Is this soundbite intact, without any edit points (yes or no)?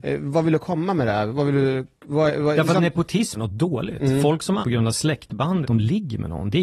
no